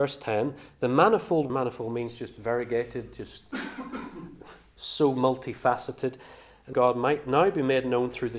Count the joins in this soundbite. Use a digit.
2